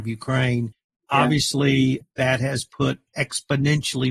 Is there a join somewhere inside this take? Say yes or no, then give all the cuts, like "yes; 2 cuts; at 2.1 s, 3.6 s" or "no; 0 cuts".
yes; 1 cut; at 3.1 s